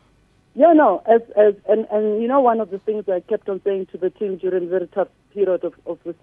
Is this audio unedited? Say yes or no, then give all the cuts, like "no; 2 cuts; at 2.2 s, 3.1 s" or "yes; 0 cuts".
yes; 0 cuts